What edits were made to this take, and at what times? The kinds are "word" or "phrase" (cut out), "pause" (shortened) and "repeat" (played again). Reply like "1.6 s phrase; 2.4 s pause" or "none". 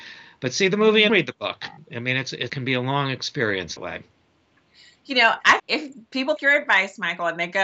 1.1 s word; 2.5 s word; 3.8 s word; 5.6 s word; 6.4 s word